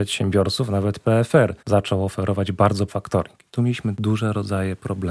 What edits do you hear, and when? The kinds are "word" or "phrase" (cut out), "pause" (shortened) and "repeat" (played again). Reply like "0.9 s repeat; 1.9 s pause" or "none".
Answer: 1.6 s pause; 2.9 s word; 3.9 s word